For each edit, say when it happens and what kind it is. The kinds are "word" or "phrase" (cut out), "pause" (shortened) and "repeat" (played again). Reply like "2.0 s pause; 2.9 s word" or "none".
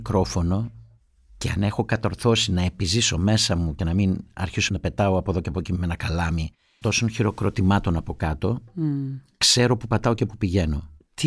6.8 s word